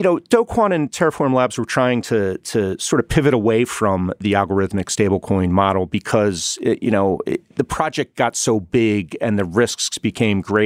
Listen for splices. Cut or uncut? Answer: uncut